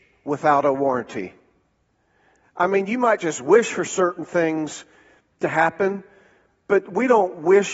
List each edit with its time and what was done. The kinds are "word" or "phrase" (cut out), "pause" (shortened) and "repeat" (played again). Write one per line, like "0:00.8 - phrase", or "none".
none